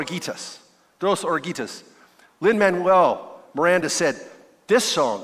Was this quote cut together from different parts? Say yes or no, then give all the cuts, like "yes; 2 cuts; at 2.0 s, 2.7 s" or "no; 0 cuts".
no; 0 cuts